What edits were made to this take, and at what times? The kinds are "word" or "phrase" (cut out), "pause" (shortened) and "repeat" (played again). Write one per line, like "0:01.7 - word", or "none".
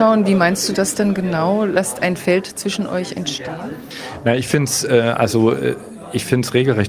none